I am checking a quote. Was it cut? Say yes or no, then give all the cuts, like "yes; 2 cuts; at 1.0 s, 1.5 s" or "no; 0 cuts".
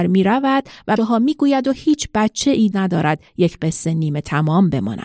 yes; 2 cuts; at 1.0 s, 2.7 s